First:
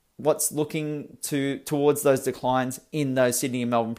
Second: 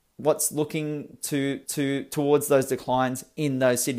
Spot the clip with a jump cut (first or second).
second